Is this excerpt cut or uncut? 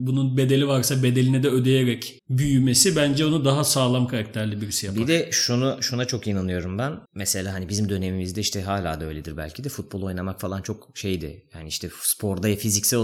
cut